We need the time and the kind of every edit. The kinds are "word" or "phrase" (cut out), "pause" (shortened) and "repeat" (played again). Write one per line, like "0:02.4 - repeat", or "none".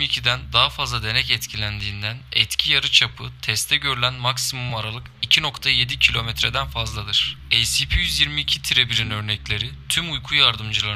none

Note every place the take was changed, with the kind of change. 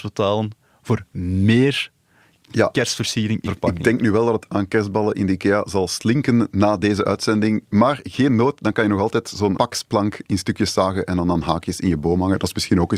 0:03.4 - word
0:04.5 - word
0:09.5 - word

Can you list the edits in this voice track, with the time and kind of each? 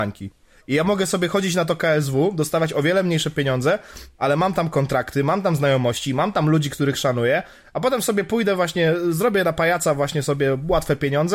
none

